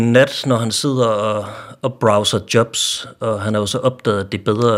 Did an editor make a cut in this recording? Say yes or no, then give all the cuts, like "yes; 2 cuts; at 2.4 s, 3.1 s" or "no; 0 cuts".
no; 0 cuts